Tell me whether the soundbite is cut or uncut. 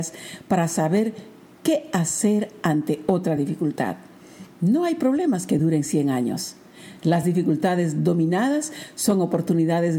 uncut